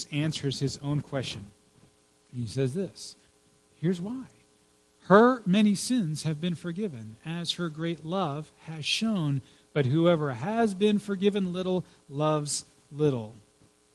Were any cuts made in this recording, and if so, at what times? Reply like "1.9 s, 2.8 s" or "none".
none